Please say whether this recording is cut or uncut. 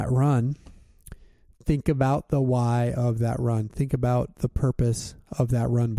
uncut